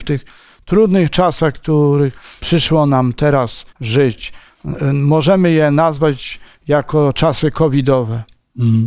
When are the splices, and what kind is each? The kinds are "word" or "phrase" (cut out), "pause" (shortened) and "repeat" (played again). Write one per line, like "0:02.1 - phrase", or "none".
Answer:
0:03.7 - pause